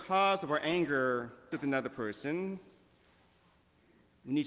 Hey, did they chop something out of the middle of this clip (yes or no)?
yes